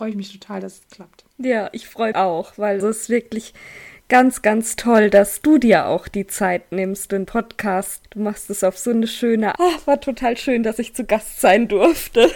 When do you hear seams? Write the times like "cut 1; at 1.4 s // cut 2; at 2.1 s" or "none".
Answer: cut 1; at 1.3 s // cut 2; at 2.1 s // cut 3; at 2.8 s // cut 4; at 7.3 s // cut 5; at 8.0 s // cut 6; at 9.6 s

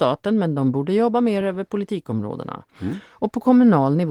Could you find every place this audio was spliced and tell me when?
none

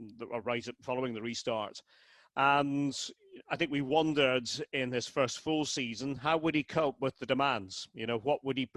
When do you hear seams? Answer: none

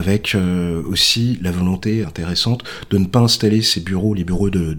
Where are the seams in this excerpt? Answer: cut 1; at 2.0 s

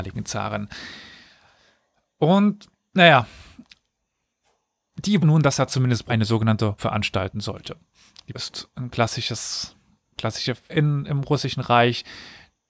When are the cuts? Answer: cut 1; at 5.2 s // cut 2; at 5.7 s // cut 3; at 6.1 s // cut 4; at 6.8 s // cut 5; at 8.3 s // cut 6; at 10.1 s // cut 7; at 10.7 s

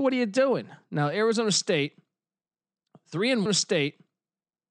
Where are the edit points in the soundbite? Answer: cut 1; at 3.5 s

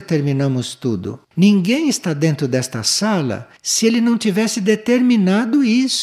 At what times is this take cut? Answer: cut 1; at 1.2 s // cut 2; at 3.6 s

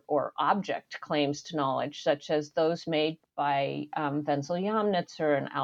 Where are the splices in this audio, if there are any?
cut 1; at 3.2 s

